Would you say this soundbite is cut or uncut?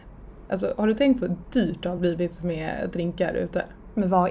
uncut